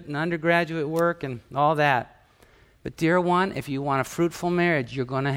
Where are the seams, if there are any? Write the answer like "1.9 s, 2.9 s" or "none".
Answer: none